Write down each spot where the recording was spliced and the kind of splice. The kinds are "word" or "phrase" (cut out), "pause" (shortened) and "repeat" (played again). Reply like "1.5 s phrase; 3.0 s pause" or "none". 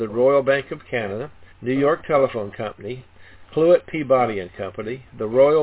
1.5 s pause